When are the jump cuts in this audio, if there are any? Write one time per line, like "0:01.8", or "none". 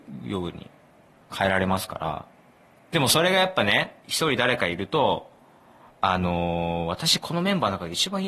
none